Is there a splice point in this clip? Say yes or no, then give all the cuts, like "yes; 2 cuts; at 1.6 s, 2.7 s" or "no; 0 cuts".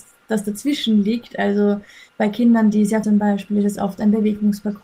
yes; 2 cuts; at 2.1 s, 3.0 s